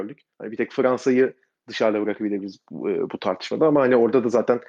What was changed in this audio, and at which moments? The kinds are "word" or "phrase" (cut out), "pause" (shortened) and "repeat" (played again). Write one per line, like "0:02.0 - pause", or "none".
none